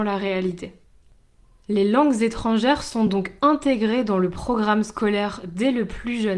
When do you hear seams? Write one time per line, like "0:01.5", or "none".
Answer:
none